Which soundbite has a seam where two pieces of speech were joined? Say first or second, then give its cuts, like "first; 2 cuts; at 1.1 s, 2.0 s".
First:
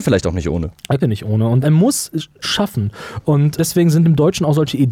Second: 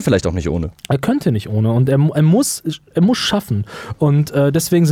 first; 4 cuts; at 1.0 s, 1.6 s, 2.4 s, 3.6 s